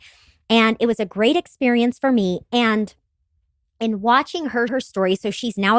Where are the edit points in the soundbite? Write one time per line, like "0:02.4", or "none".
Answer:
0:04.7